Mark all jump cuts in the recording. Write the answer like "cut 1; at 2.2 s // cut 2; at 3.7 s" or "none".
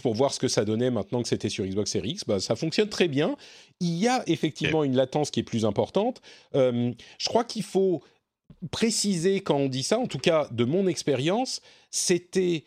none